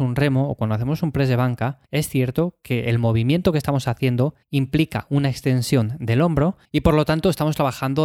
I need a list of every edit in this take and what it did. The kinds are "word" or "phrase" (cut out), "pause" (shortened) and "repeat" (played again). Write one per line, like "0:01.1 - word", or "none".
0:01.8 - pause
0:04.4 - pause
0:06.6 - pause

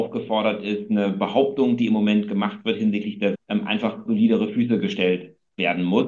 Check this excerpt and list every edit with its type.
0:03.3 - word
0:04.1 - word

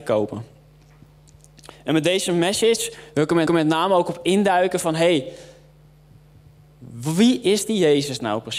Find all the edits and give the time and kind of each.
0:03.5 - repeat

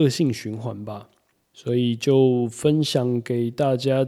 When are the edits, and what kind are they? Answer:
none

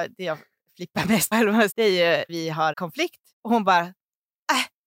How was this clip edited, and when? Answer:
0:01.3 - word
0:01.7 - phrase
0:02.3 - word
0:02.7 - word
0:03.3 - pause

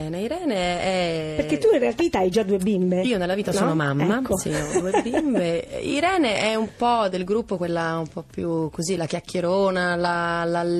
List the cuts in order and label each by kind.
0:02.0 - word

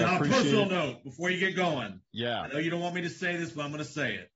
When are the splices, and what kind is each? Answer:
0:02.1 - pause

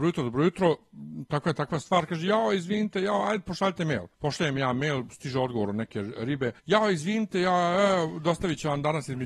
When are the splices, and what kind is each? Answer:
0:04.1 - pause
0:06.6 - pause

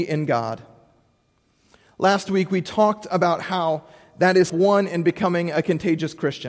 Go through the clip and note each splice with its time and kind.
0:04.5 - word

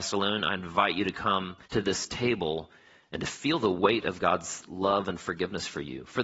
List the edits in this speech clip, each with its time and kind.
0:01.6 - pause

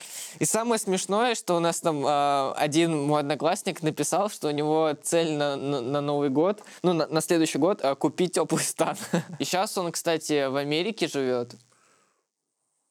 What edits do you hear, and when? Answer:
none

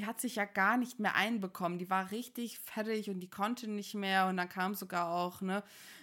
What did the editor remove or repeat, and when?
none

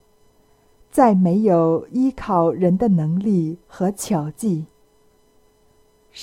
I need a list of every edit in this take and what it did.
0:03.6 - pause

